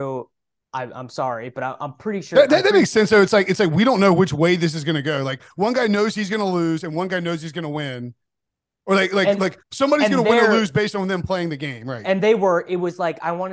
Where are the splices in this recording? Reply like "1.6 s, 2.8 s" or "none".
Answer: 9.6 s